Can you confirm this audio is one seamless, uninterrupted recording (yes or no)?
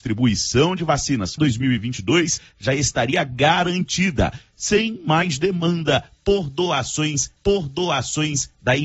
no